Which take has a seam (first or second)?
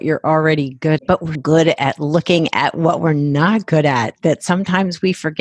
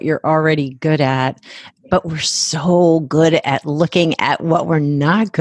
first